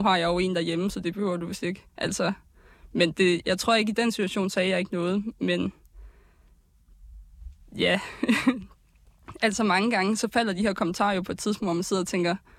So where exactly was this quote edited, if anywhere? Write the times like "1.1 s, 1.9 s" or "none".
1.9 s